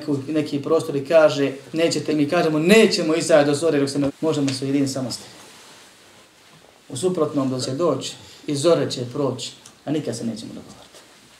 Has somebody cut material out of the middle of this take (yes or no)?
yes